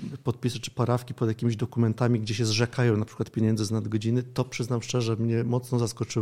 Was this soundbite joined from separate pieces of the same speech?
no; 0 cuts

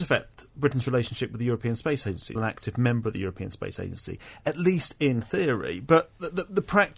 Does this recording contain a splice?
yes; 1 cut; at 2.4 s

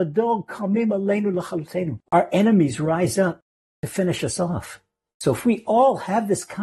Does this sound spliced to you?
yes; 1 cut; at 2.0 s

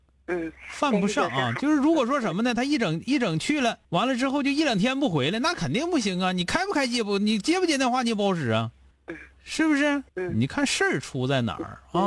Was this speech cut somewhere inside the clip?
yes; 3 cuts; at 3.8 s, 8.9 s, 10.1 s

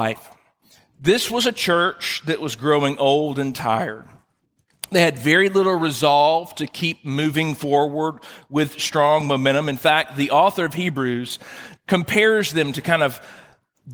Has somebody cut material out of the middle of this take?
yes; 1 cut; at 11.8 s

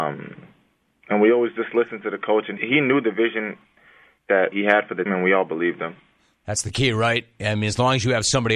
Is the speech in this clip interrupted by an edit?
yes; 3 cuts; at 2.6 s, 4.5 s, 5.1 s

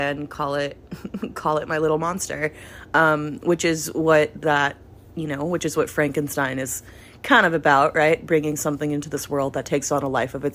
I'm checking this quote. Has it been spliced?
no; 0 cuts

